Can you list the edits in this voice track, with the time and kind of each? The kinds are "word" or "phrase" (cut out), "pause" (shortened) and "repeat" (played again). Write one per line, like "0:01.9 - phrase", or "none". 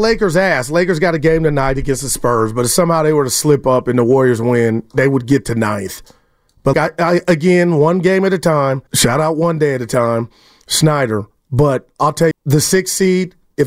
0:06.7 - word
0:08.9 - pause
0:12.3 - phrase